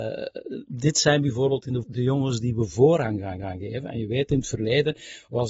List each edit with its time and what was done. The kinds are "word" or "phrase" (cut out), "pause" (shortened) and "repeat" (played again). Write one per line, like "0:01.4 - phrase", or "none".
0:01.8 - word
0:03.4 - repeat